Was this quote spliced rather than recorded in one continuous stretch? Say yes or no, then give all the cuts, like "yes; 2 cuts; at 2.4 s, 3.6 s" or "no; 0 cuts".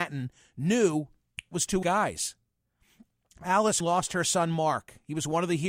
yes; 3 cuts; at 1.5 s, 1.8 s, 3.8 s